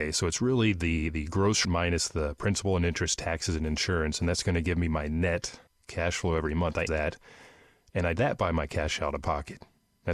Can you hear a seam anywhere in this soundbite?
yes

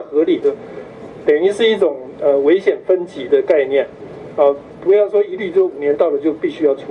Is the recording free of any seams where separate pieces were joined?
yes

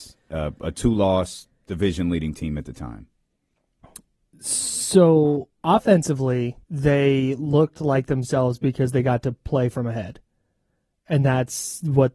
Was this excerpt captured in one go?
no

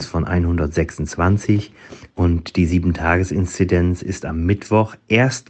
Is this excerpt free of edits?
yes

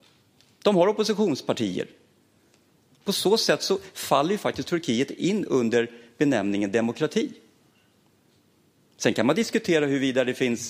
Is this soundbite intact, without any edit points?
yes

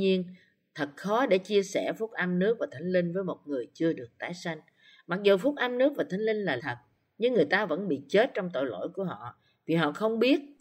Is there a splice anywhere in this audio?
yes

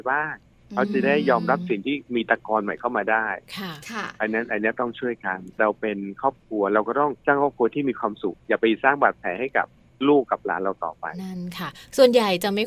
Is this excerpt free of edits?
no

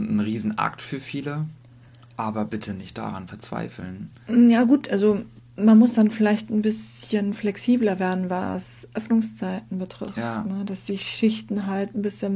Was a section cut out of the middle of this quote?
yes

